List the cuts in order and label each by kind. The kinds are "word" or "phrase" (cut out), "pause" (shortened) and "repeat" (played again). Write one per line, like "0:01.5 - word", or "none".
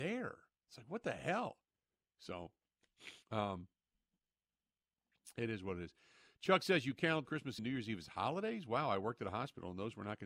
0:03.2 - pause
0:07.3 - word
0:07.6 - word